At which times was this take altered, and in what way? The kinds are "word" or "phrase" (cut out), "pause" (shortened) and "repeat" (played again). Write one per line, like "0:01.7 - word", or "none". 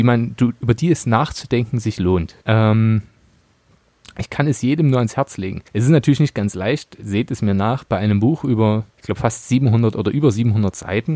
0:02.4 - pause
0:05.7 - pause
0:08.9 - pause